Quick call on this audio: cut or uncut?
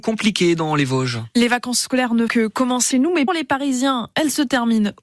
cut